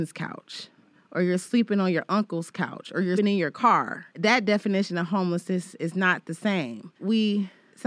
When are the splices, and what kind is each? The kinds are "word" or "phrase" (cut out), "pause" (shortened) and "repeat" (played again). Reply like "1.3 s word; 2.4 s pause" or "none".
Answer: 3.2 s word; 6.9 s pause